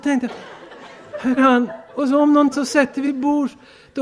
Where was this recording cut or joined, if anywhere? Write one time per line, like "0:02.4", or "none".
0:01.4
0:02.5
0:03.0

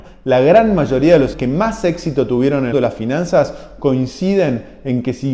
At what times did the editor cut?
0:01.3
0:02.7

